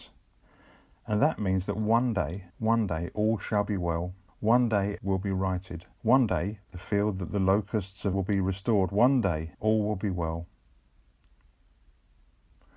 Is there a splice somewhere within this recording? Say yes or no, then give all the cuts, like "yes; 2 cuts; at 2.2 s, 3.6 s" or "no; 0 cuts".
yes; 6 cuts; at 2.5 s, 4.3 s, 5.0 s, 5.9 s, 8.1 s, 9.5 s